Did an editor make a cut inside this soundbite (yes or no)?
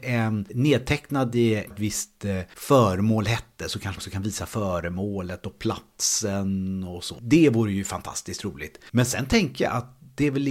yes